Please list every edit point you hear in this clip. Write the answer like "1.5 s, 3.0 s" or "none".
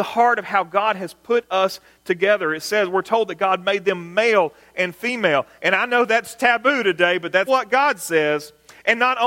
7.5 s